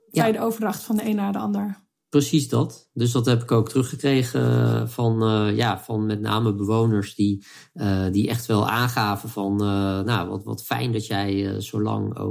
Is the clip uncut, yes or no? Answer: yes